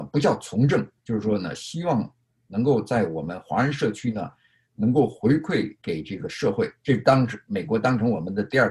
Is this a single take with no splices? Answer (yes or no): yes